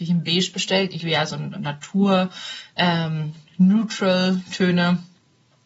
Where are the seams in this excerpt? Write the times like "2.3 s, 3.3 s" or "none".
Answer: 1.0 s, 1.5 s

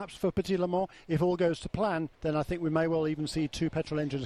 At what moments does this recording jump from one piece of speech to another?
2.1 s

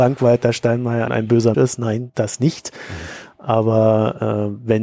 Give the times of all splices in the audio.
1.1 s, 1.5 s, 2.1 s

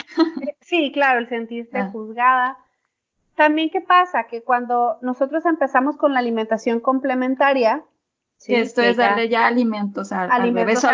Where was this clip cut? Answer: none

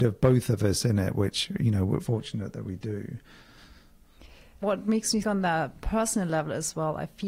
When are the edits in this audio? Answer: 2.0 s, 4.6 s, 5.2 s

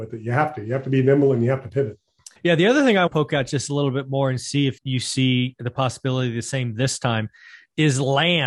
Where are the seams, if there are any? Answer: 2.4 s, 3.1 s, 4.8 s

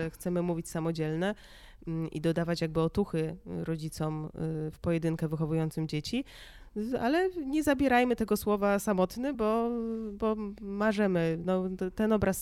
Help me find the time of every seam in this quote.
none

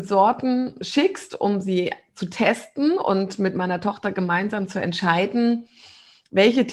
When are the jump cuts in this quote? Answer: none

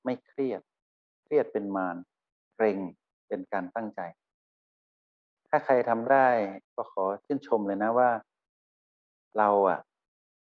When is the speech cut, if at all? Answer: 5.1 s, 6.6 s

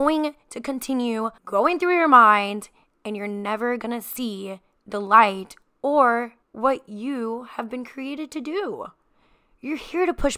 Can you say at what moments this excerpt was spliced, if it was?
1.4 s, 6.4 s

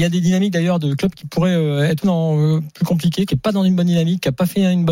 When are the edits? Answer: 2.0 s, 3.3 s

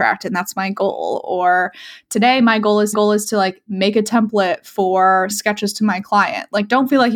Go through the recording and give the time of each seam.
2.9 s, 5.3 s

